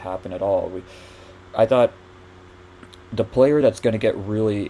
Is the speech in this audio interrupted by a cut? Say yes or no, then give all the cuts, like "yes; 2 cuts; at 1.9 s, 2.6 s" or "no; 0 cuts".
no; 0 cuts